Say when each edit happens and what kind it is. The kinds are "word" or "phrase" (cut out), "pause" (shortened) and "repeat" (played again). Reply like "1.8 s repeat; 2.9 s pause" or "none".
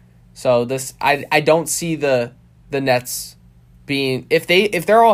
none